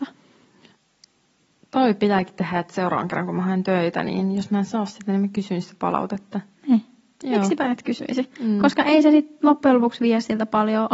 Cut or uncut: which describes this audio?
uncut